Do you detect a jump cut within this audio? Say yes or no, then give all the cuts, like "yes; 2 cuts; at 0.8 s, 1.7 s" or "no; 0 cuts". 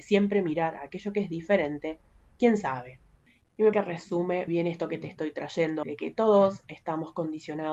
yes; 4 cuts; at 2.3 s, 3.7 s, 4.5 s, 5.8 s